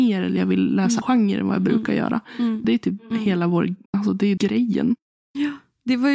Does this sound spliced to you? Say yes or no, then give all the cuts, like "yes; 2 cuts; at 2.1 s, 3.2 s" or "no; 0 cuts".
yes; 4 cuts; at 1.0 s, 2.6 s, 3.9 s, 4.4 s